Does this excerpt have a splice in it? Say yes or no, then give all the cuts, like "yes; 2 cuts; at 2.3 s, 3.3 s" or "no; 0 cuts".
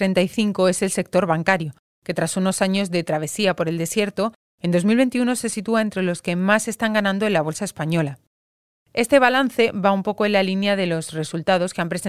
no; 0 cuts